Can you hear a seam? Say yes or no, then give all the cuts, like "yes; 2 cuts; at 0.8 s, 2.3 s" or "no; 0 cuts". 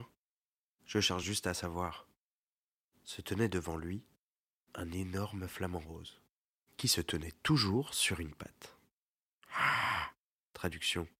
no; 0 cuts